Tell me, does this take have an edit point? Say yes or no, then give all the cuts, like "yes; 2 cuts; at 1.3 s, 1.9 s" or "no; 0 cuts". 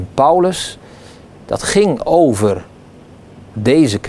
no; 0 cuts